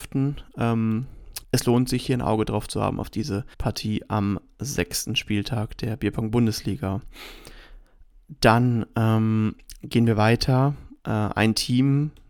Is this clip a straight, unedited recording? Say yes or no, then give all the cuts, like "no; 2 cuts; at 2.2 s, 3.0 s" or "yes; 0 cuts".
no; 3 cuts; at 1.4 s, 3.5 s, 11.0 s